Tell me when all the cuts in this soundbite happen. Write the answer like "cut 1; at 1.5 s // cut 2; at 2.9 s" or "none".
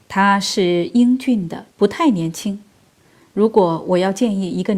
cut 1; at 1.7 s